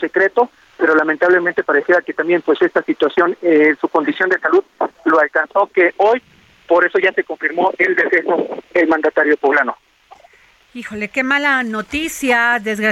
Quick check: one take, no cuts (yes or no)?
yes